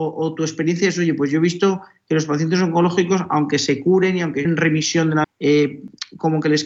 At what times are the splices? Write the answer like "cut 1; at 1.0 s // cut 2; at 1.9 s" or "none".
cut 1; at 4.4 s // cut 2; at 5.2 s